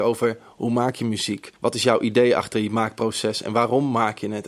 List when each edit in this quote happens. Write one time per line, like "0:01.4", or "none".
0:01.6